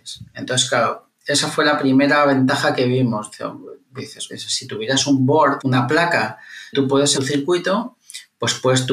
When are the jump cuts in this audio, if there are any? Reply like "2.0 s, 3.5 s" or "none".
4.3 s, 5.6 s, 6.7 s, 7.1 s